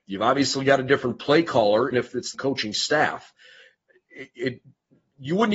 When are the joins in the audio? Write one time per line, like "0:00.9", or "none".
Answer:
0:01.9
0:02.3